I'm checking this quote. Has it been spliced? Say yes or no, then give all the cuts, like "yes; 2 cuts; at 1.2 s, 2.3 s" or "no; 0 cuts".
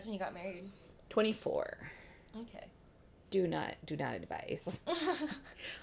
no; 0 cuts